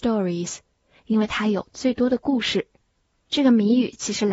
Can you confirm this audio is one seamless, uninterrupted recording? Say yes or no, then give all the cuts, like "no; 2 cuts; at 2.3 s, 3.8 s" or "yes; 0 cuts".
no; 1 cut; at 1.0 s